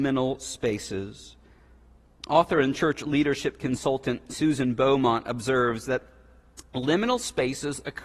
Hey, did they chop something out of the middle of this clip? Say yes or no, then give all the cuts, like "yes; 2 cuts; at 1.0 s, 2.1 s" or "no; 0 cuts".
no; 0 cuts